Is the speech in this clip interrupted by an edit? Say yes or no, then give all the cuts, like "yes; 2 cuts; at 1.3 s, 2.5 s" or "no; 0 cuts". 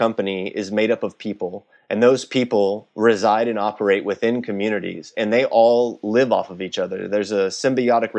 no; 0 cuts